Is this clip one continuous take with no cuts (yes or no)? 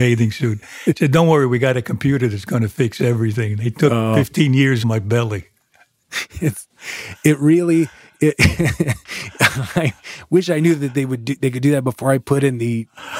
no